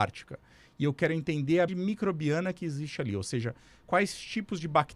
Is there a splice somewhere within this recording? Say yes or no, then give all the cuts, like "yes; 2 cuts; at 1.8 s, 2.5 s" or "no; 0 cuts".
yes; 1 cut; at 1.7 s